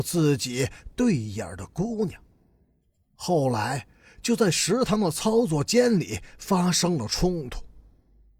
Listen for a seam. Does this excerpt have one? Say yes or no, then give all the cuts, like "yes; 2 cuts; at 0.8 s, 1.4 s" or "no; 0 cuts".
no; 0 cuts